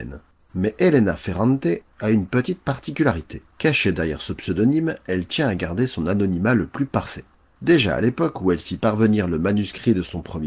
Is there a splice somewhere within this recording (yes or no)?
yes